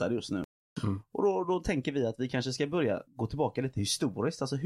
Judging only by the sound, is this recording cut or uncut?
uncut